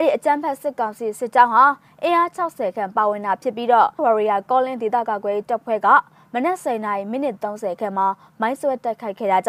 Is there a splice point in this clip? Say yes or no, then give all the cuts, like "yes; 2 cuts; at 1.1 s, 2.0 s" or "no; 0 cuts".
yes; 1 cut; at 4.0 s